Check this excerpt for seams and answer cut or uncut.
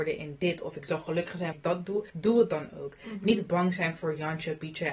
cut